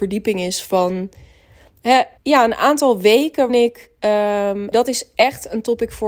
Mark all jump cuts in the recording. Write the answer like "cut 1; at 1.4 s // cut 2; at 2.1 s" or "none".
cut 1; at 2.2 s // cut 2; at 3.5 s // cut 3; at 4.7 s